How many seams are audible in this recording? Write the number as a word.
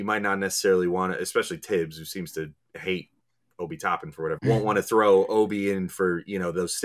one